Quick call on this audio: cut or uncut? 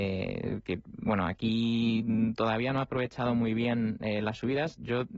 uncut